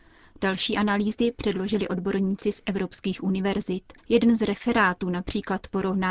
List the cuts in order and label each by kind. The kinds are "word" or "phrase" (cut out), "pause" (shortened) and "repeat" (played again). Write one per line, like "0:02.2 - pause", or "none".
0:04.0 - pause